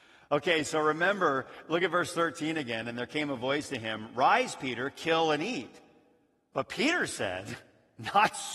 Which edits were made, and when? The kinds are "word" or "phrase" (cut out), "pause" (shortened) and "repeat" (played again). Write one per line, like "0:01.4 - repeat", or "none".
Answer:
none